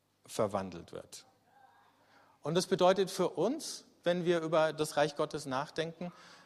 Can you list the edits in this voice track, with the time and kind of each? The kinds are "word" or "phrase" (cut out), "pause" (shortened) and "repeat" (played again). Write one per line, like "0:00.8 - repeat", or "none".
none